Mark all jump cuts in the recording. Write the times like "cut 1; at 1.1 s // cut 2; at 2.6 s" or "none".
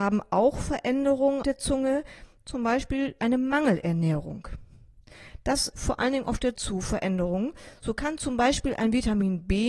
cut 1; at 1.4 s // cut 2; at 3.2 s // cut 3; at 5.7 s // cut 4; at 6.5 s